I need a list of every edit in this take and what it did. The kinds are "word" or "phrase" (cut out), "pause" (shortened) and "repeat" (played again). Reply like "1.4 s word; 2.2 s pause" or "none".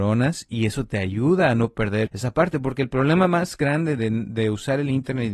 2.1 s word